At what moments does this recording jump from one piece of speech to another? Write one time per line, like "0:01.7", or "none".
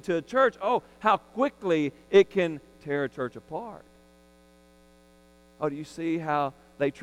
none